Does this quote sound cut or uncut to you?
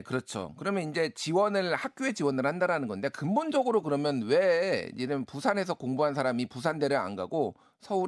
uncut